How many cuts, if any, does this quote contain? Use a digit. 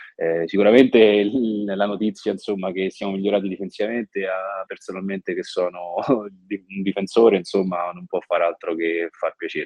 1